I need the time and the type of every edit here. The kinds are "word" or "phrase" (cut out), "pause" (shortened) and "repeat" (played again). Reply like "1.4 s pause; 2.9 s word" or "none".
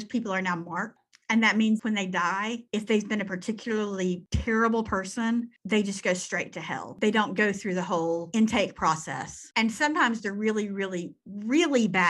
none